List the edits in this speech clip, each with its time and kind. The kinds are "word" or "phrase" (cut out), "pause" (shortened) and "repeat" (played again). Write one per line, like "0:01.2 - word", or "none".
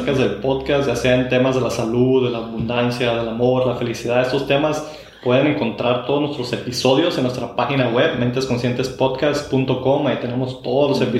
none